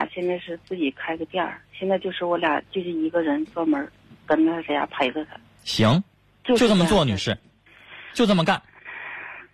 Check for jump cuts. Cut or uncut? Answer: uncut